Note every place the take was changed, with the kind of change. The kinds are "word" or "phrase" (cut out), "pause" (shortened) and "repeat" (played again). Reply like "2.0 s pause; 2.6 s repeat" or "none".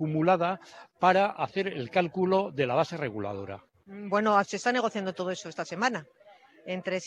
none